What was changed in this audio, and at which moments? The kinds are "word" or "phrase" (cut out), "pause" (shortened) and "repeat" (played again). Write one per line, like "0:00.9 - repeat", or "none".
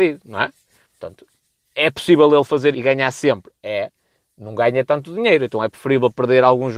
0:02.7 - word